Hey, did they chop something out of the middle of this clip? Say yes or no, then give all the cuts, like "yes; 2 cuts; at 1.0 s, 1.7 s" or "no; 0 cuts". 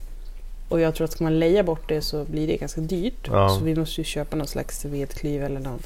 no; 0 cuts